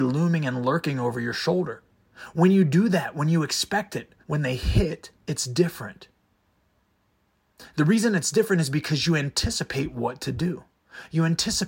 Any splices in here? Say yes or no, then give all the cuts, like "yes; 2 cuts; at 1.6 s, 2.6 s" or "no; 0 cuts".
yes; 2 cuts; at 4.2 s, 5.2 s